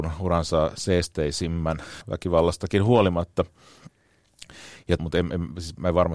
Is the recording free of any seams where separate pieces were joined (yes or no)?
no